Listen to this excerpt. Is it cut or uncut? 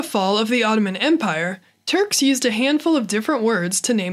uncut